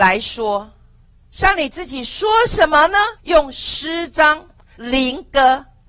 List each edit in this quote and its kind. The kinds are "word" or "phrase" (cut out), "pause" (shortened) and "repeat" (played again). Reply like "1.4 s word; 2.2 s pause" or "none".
3.2 s pause; 4.7 s phrase